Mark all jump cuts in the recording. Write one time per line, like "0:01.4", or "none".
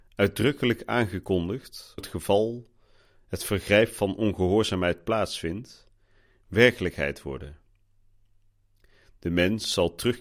0:02.0